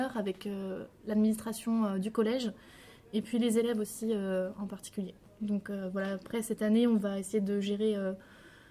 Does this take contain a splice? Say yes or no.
no